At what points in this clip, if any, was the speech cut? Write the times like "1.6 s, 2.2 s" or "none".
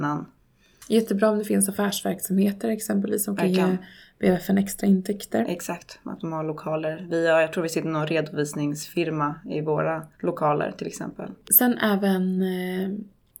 10.1 s